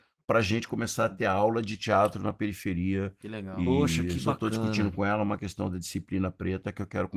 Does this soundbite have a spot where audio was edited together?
no; 0 cuts

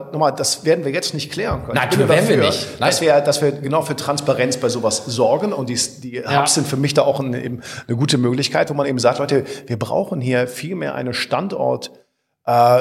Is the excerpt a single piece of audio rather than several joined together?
yes; 0 cuts

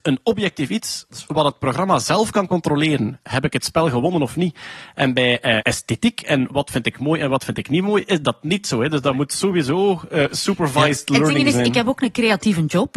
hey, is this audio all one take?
no; 1 cut; at 5.6 s

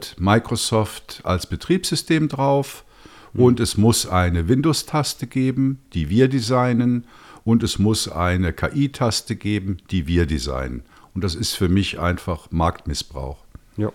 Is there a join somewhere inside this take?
no; 0 cuts

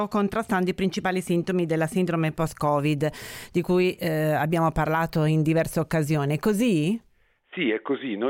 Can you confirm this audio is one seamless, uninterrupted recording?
yes; 0 cuts

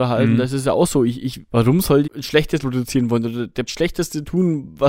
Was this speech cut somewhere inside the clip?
yes; 4 cuts; at 1.5 s, 2.0 s, 2.6 s, 3.7 s

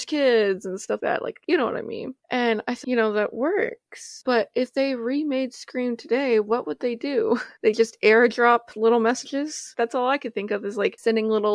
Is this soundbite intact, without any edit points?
no; 2 cuts; at 1.0 s, 2.8 s

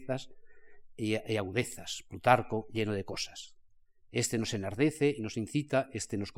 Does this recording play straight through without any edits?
yes; 0 cuts

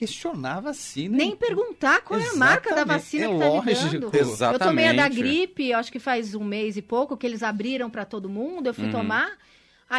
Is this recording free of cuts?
yes; 0 cuts

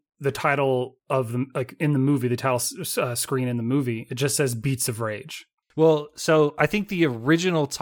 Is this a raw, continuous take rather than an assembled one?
yes; 0 cuts

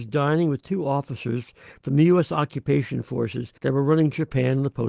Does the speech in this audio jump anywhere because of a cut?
yes; 1 cut; at 3.6 s

